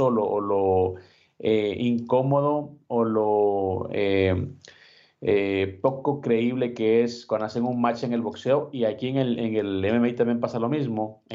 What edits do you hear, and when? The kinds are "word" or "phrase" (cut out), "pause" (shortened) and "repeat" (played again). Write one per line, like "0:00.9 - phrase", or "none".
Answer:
none